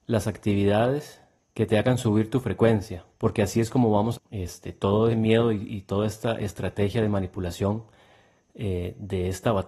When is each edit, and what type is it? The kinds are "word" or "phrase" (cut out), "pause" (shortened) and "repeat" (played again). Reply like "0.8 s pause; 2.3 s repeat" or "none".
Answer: 1.4 s pause; 3.1 s pause; 4.1 s phrase; 5.1 s word